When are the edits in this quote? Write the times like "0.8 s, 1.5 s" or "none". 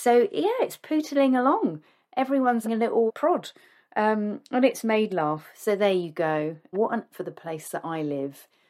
2.6 s, 3.1 s, 5.1 s, 6.7 s, 7.1 s